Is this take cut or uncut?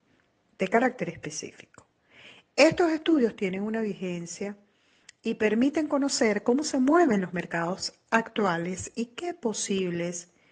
uncut